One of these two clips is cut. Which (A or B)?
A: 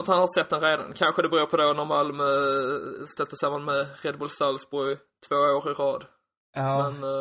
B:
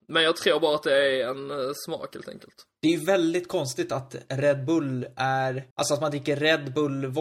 B